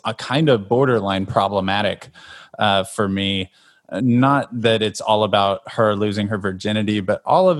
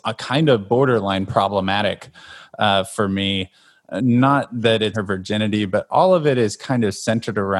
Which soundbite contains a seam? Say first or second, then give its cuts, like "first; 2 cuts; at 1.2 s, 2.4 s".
second; 1 cut; at 4.9 s